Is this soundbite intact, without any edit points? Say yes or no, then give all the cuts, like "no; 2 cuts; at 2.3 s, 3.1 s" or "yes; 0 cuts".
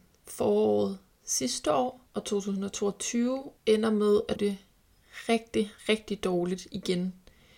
no; 4 cuts; at 2.1 s, 3.6 s, 4.4 s, 5.8 s